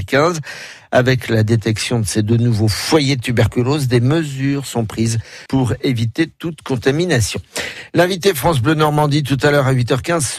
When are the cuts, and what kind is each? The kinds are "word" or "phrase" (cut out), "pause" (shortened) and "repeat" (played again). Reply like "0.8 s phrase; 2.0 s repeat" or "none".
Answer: 5.5 s pause

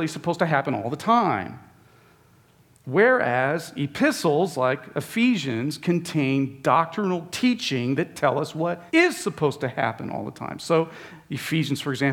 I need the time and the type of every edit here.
8.9 s pause

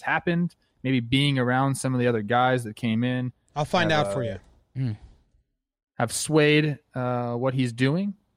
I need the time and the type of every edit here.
none

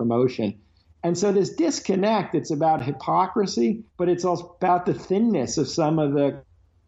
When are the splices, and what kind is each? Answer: 3.9 s pause

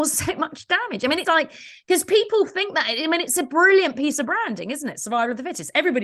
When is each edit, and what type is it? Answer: 1.2 s word

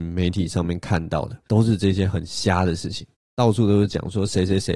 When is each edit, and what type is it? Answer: 1.4 s pause

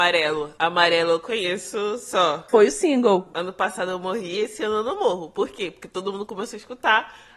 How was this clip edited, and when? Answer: none

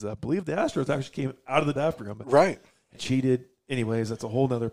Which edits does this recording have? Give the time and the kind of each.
1.8 s word; 3.0 s word

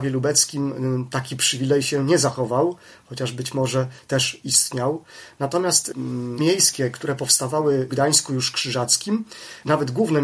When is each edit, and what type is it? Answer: 6.4 s word; 7.9 s word

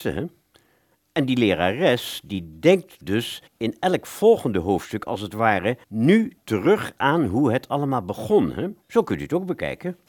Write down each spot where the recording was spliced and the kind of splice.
3.5 s pause; 5.8 s pause; 8.8 s pause

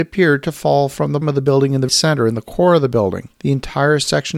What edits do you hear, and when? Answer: 1.2 s word; 1.9 s word; 3.3 s pause

